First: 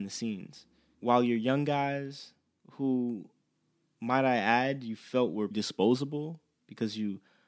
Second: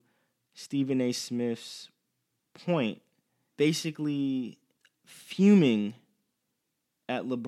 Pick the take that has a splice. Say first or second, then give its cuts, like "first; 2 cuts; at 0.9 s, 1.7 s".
first; 1 cut; at 5.5 s